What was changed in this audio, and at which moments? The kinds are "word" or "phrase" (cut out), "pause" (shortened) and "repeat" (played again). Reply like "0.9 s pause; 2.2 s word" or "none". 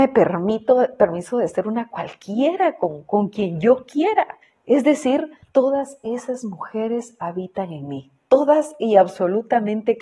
4.4 s pause; 5.4 s pause

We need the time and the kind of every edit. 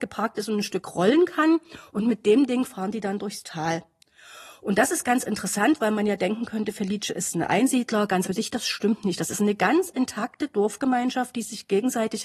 8.2 s word

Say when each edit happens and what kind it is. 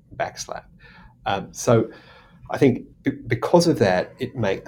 2.9 s pause

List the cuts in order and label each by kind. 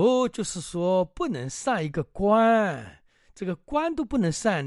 none

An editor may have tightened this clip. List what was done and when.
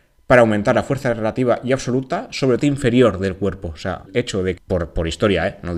2.6 s phrase; 4.1 s word; 4.6 s phrase

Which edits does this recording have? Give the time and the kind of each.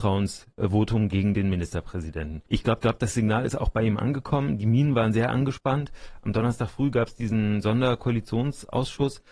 2.5 s pause; 2.8 s repeat

